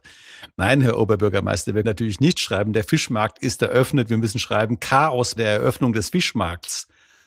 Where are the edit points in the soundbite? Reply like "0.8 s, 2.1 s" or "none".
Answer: 1.8 s, 5.4 s